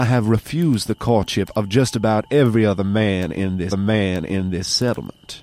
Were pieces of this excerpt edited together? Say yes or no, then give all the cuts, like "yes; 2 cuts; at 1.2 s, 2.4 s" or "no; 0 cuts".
yes; 1 cut; at 3.7 s